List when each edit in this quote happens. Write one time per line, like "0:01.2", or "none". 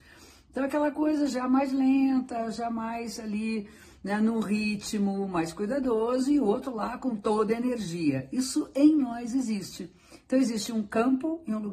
none